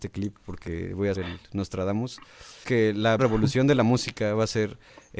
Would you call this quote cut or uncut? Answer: cut